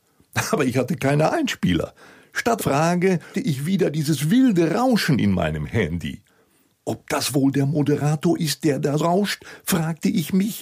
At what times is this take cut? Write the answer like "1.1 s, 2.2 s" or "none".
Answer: 2.6 s, 3.3 s, 9.0 s